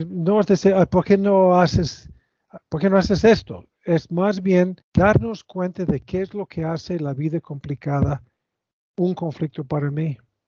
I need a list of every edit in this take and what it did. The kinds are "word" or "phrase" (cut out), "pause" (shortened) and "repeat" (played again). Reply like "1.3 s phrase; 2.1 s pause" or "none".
4.8 s pause